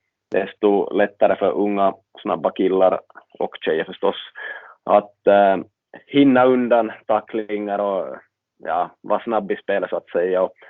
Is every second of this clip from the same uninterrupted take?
yes; 0 cuts

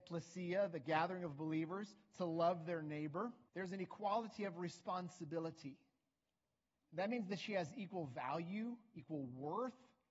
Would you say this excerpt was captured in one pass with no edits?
no; 2 cuts; at 3.5 s, 6.6 s

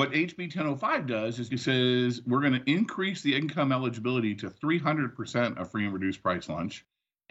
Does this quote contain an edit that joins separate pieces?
yes; 1 cut; at 1.5 s

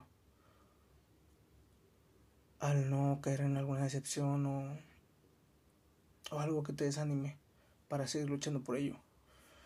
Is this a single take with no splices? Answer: yes; 0 cuts

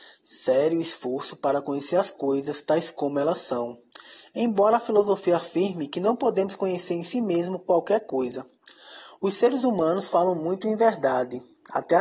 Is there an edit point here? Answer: no; 0 cuts

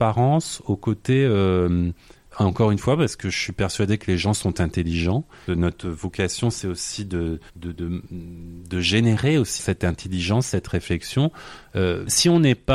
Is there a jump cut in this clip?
yes; 4 cuts; at 2.3 s, 5.5 s, 7.5 s, 9.6 s

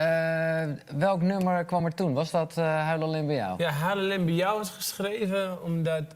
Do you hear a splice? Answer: no; 0 cuts

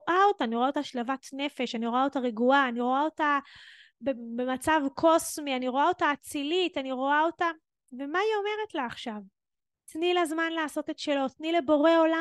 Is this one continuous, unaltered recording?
yes; 0 cuts

